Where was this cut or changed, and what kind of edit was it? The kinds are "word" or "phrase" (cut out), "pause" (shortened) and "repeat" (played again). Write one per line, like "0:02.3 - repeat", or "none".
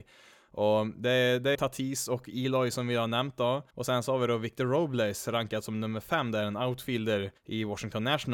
0:01.5 - phrase
0:03.7 - pause
0:07.4 - pause